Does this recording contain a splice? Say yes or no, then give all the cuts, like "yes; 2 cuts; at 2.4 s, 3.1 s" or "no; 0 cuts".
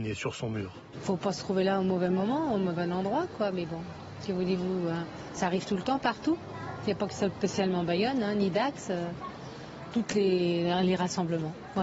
no; 0 cuts